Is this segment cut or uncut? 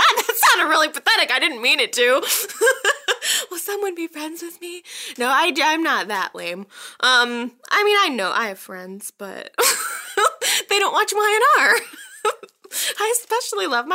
uncut